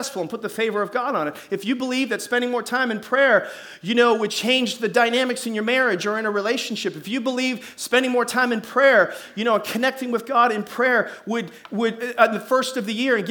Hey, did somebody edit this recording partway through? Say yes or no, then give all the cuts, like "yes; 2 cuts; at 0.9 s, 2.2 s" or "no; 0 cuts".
no; 0 cuts